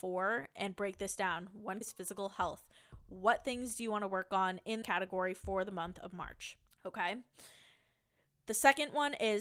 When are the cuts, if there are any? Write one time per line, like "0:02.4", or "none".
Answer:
0:01.8
0:04.8
0:06.7